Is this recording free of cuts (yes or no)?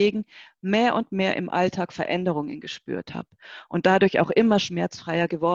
yes